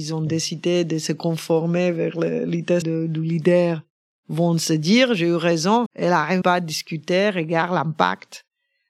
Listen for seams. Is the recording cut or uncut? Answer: cut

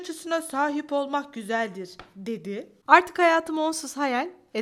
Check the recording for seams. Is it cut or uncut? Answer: uncut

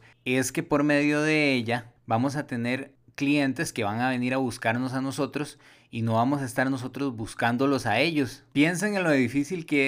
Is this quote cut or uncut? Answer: uncut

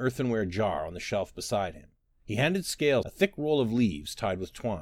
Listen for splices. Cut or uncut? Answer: cut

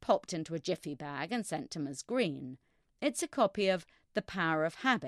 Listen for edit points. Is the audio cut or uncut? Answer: uncut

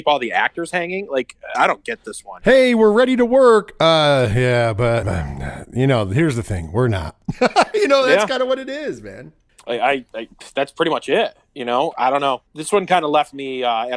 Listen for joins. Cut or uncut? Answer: cut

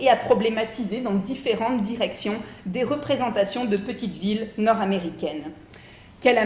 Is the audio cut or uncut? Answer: uncut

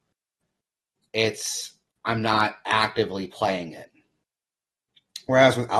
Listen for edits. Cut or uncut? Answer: uncut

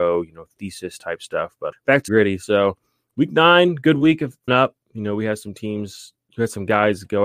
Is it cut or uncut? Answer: cut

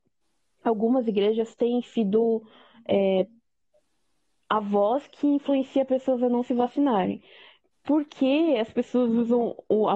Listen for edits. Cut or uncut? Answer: uncut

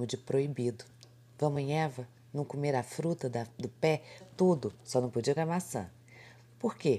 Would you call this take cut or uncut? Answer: cut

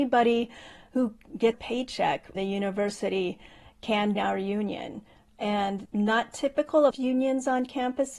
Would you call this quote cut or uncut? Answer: cut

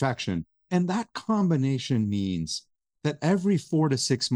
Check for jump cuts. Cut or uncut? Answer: uncut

